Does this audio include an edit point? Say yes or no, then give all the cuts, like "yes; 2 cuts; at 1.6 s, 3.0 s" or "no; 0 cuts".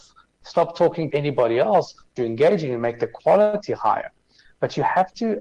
yes; 2 cuts; at 1.1 s, 2.2 s